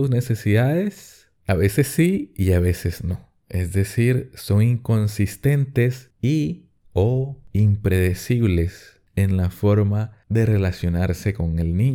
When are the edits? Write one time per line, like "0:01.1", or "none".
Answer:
0:07.5